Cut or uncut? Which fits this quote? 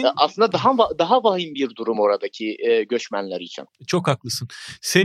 uncut